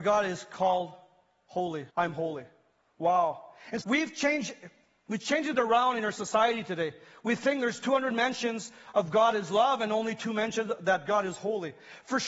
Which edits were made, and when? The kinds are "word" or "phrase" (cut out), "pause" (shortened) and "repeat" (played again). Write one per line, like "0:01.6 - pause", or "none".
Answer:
0:01.9 - pause
0:03.8 - word